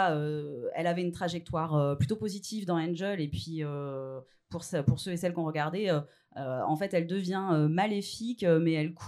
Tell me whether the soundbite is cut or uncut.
uncut